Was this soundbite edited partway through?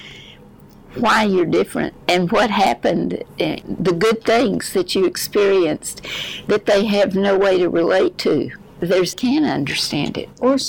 yes; 2 cuts; at 2.0 s, 9.1 s

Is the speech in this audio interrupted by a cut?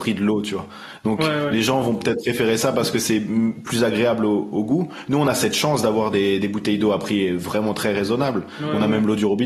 no; 0 cuts

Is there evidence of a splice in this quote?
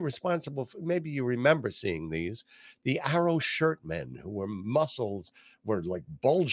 no; 0 cuts

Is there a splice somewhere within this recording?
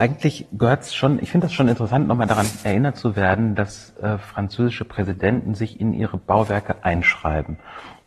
no; 0 cuts

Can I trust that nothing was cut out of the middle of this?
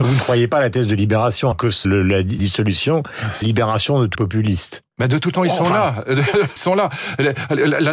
no; 7 cuts; at 1.5 s, 1.8 s, 2.4 s, 3.4 s, 4.1 s, 5.3 s, 6.6 s

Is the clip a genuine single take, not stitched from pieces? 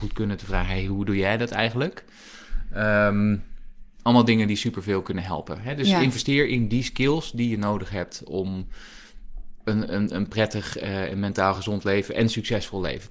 yes; 0 cuts

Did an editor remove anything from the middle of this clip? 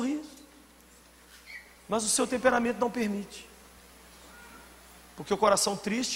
no; 0 cuts

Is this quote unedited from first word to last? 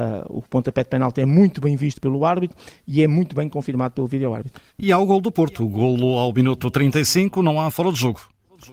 no; 1 cut; at 4.7 s

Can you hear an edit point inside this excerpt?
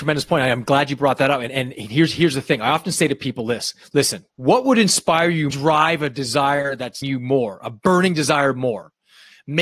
yes; 4 cuts; at 1.5 s, 4.3 s, 5.5 s, 7.0 s

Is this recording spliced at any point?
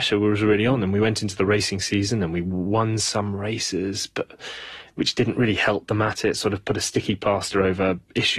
no; 0 cuts

